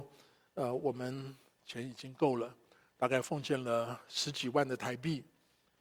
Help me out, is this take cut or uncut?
uncut